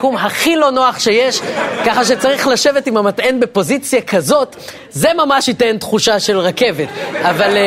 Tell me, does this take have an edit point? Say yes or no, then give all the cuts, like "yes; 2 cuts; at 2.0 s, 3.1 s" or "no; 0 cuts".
no; 0 cuts